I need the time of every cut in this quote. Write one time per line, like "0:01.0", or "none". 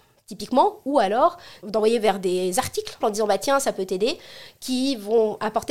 0:03.0

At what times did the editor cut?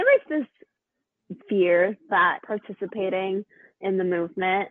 0:01.4
0:02.4
0:03.7

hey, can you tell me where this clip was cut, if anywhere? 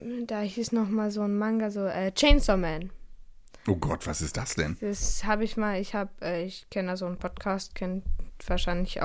none

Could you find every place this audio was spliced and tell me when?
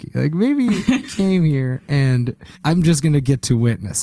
0:01.0
0:02.5

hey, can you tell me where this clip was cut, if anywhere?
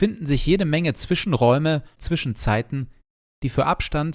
0:02.0

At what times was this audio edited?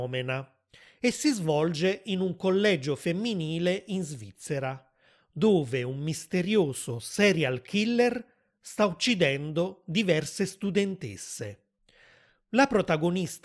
none

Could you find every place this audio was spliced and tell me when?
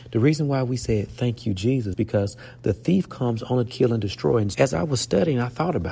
0:01.9
0:03.7
0:04.5

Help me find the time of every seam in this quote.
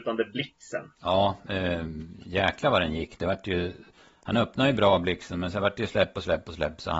0:01.0

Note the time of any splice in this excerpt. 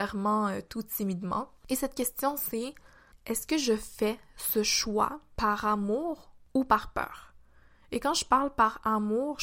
none

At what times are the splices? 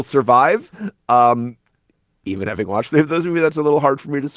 none

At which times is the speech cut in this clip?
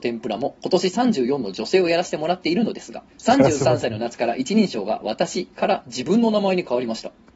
0:03.1

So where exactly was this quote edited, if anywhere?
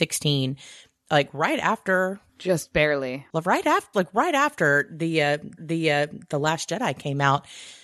0:03.9
0:05.6

